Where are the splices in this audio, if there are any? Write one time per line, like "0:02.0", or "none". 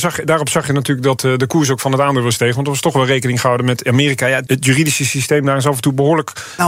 0:01.2
0:04.5

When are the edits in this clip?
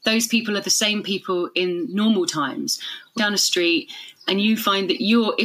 0:03.2

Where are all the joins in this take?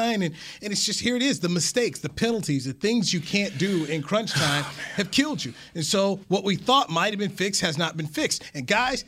none

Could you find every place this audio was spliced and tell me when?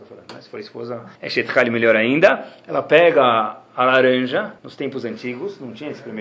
0:01.1
0:04.6

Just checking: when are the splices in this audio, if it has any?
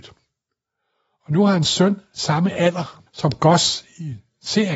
0:03.1

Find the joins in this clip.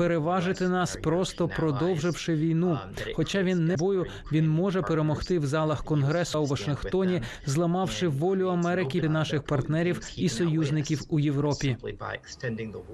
0:03.7
0:06.3
0:09.0

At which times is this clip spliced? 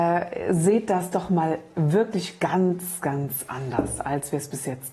none

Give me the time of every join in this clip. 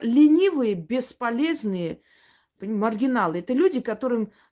0:02.6

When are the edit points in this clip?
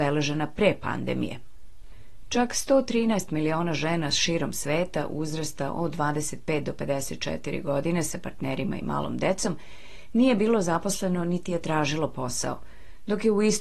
none

